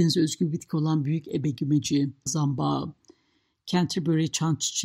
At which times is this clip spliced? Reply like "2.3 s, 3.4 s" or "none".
2.3 s